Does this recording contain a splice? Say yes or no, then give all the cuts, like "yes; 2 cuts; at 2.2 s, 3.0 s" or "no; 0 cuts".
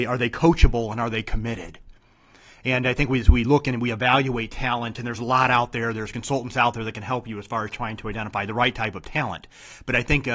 no; 0 cuts